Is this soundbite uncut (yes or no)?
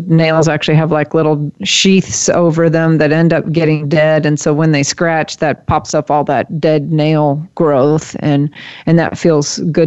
yes